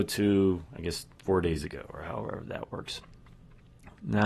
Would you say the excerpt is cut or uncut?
uncut